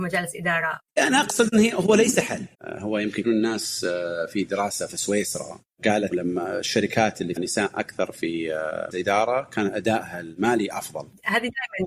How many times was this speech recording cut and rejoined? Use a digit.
5